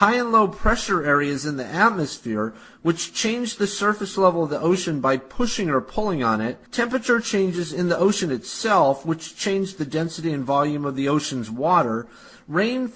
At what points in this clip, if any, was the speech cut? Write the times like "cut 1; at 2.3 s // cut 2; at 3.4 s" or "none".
cut 1; at 6.7 s